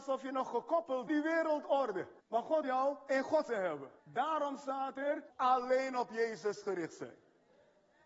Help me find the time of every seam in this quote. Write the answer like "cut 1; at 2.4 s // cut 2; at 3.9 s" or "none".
cut 1; at 1.1 s // cut 2; at 2.2 s // cut 3; at 2.6 s // cut 4; at 3.5 s // cut 5; at 4.0 s // cut 6; at 5.3 s